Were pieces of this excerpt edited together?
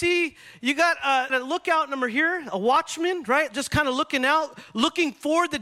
yes; 1 cut; at 1.3 s

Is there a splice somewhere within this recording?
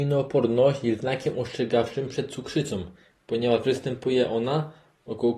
no; 0 cuts

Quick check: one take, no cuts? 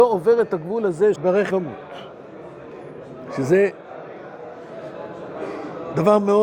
no; 2 cuts; at 1.2 s, 1.5 s

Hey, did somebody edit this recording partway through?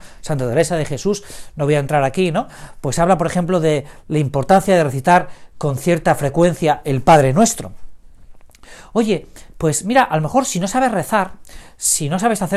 no; 0 cuts

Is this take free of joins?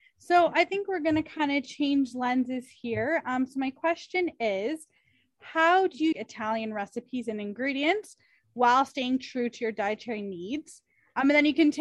no; 1 cut; at 6.1 s

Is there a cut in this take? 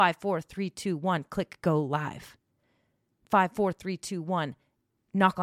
no; 0 cuts

